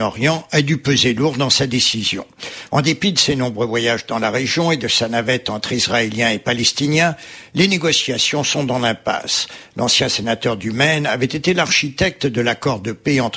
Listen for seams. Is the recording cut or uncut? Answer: uncut